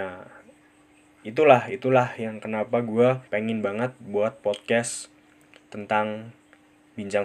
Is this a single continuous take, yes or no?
no